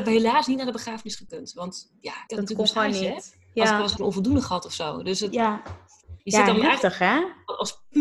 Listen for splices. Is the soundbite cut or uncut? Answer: cut